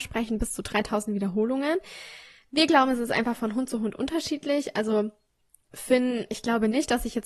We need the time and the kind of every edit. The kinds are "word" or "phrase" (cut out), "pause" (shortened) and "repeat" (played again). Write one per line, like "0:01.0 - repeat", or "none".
none

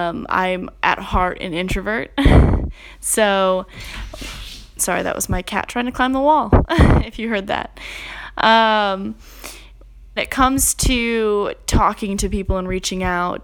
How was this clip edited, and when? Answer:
0:10.2 - word

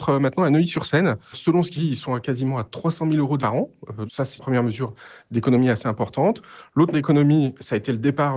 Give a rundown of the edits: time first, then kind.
0:01.3 - word
0:01.8 - word
0:03.4 - word
0:04.1 - word
0:04.4 - word
0:06.9 - word

